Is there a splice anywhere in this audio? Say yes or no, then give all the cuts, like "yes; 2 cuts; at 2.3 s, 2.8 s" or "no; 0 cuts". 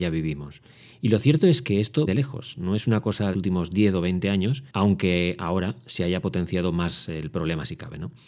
yes; 3 cuts; at 2.1 s, 3.3 s, 4.7 s